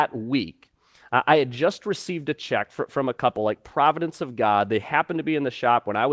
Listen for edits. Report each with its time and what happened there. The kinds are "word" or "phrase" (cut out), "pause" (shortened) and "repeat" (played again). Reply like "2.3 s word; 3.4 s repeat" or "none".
none